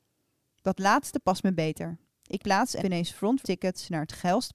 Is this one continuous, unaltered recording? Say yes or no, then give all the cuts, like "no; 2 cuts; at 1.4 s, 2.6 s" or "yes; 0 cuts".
no; 3 cuts; at 2.4 s, 2.8 s, 3.4 s